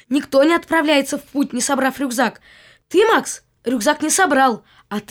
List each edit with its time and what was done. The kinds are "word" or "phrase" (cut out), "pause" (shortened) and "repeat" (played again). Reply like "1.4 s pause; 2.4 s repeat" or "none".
none